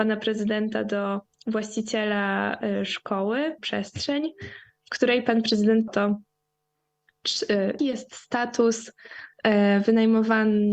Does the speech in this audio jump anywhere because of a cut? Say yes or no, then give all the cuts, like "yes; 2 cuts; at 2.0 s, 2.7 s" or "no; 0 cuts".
yes; 4 cuts; at 1.3 s, 3.6 s, 5.9 s, 7.8 s